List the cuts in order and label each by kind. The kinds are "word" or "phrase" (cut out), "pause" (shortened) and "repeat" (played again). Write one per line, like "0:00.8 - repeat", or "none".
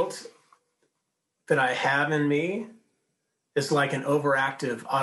none